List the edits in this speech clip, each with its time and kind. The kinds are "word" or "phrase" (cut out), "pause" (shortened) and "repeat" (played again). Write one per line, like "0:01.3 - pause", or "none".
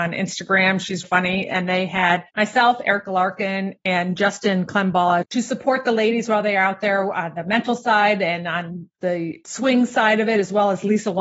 0:01.0 - word
0:02.3 - pause